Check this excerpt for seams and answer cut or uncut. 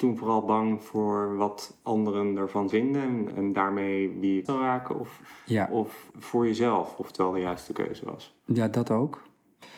cut